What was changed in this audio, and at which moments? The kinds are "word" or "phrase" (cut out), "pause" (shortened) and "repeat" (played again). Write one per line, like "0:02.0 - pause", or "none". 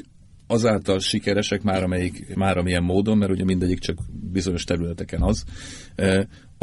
0:02.3 - word